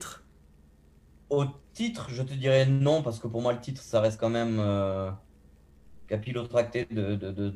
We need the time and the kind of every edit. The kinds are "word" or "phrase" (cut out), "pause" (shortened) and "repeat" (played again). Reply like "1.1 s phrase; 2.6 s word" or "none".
none